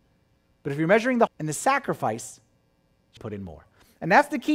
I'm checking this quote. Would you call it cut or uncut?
cut